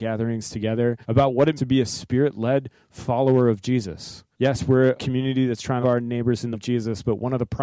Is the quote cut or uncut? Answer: cut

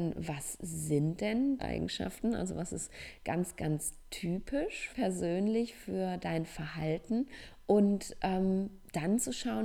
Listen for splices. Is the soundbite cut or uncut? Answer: cut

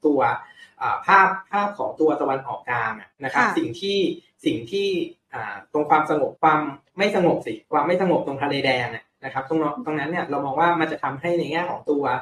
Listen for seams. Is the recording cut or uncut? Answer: cut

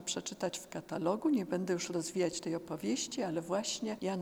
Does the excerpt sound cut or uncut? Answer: uncut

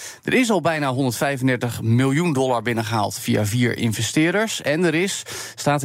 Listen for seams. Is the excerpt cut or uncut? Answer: uncut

